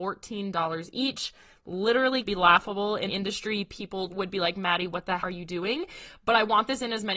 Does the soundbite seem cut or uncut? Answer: cut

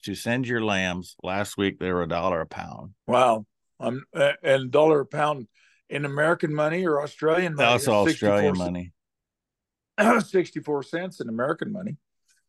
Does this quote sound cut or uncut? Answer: cut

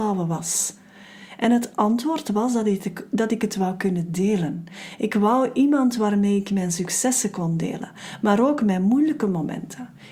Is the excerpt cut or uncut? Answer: uncut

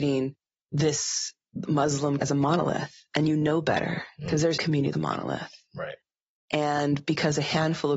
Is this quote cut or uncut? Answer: cut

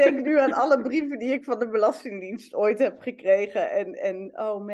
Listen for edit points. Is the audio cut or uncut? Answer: uncut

